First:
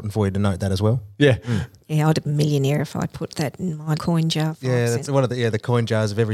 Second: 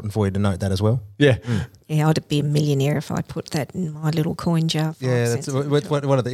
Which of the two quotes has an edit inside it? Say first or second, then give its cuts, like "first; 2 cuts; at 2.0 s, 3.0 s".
first; 3 cuts; at 2.2 s, 4.0 s, 5.1 s